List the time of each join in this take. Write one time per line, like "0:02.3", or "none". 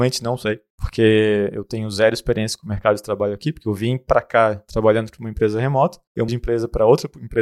0:06.3